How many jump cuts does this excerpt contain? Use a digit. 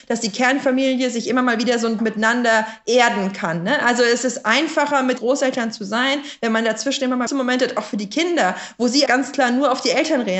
4